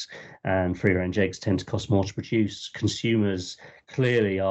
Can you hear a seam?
no; 0 cuts

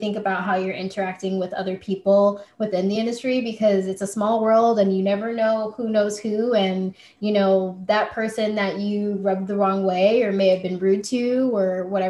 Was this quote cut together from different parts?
no; 0 cuts

